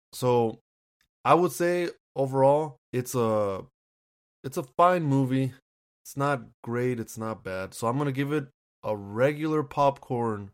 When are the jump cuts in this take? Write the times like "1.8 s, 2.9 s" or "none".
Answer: 2.8 s